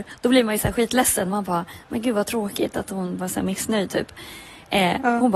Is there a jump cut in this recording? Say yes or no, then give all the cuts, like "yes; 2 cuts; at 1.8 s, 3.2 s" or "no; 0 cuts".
no; 0 cuts